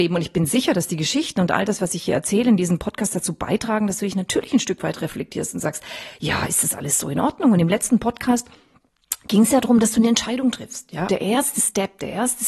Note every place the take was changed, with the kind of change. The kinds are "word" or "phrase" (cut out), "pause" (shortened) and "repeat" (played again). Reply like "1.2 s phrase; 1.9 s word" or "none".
11.1 s word

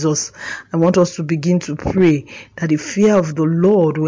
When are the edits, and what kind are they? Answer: none

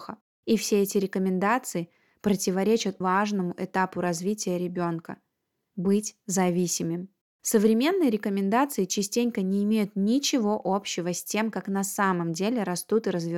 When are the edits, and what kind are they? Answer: 3.0 s word

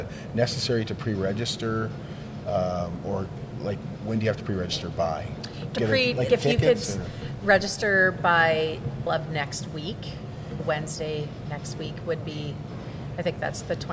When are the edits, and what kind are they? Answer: 5.7 s word; 6.3 s word; 9.1 s word; 10.6 s word

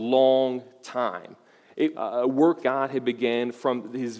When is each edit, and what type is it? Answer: 1.9 s word; 2.6 s word

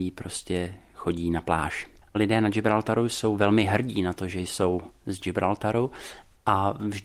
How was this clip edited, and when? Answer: 2.0 s pause

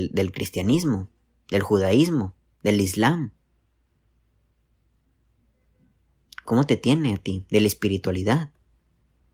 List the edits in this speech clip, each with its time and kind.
none

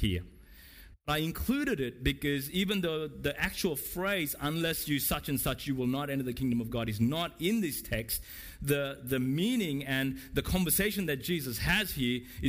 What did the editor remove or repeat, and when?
none

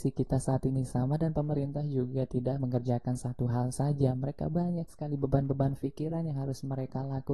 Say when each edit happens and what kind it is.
none

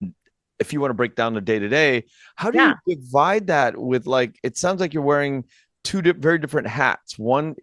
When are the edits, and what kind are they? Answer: none

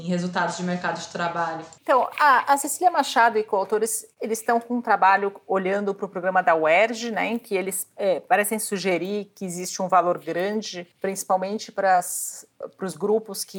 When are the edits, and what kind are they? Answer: 1.8 s pause; 10.9 s pause

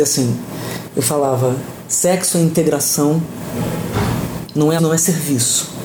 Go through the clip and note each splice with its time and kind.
4.8 s word

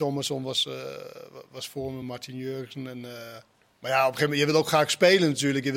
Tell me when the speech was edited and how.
none

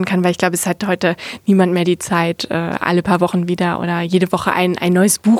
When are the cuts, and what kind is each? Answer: none

